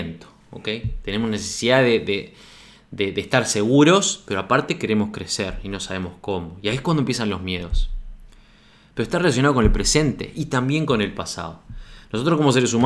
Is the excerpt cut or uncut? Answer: uncut